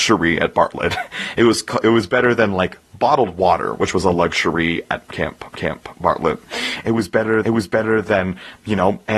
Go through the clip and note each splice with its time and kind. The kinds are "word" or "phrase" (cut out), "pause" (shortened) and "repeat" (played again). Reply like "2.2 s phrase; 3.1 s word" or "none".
5.5 s repeat; 7.4 s repeat

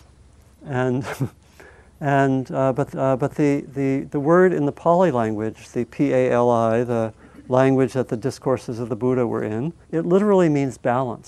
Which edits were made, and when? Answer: 2.9 s repeat; 9.8 s pause

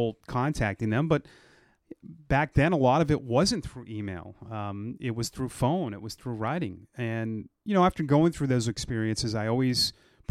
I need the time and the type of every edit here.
7.6 s pause

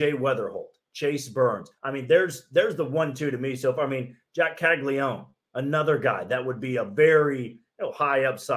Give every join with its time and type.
1.8 s pause; 5.4 s pause

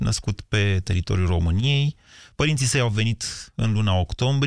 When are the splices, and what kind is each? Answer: none

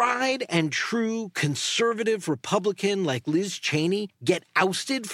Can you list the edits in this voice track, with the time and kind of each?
none

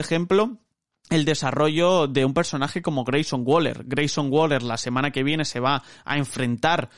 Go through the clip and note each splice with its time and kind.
none

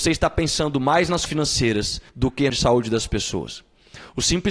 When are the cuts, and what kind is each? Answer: 1.3 s word; 2.1 s pause; 2.5 s phrase

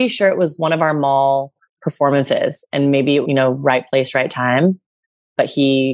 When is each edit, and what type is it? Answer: 1.6 s pause; 3.2 s word

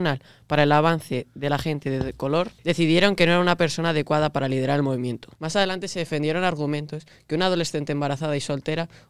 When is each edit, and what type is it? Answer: 5.3 s pause

